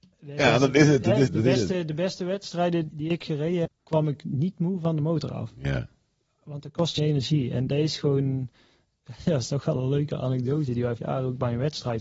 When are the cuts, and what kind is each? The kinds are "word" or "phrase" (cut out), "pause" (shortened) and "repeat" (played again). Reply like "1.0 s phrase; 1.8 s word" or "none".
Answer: 1.3 s word; 2.9 s word; 3.7 s word; 7.0 s word; 7.7 s word; 11.0 s word